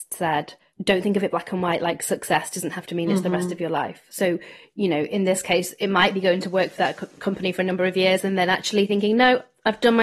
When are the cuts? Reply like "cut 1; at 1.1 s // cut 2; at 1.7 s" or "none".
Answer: none